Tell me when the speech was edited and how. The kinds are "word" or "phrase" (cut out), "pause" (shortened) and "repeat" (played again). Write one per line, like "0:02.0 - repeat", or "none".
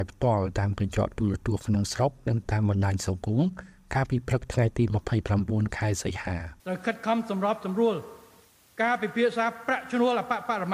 0:06.6 - pause